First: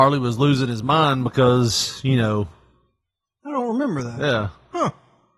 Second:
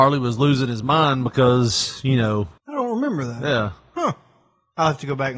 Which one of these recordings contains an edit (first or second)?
second